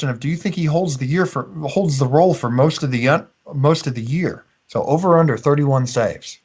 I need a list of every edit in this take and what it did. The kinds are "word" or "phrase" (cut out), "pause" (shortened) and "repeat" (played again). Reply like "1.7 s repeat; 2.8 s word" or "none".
none